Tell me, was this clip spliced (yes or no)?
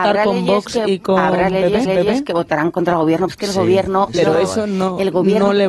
yes